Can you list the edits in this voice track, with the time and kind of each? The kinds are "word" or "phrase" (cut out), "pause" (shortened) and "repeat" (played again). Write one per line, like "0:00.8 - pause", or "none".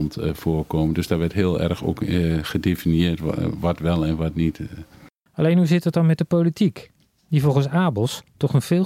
none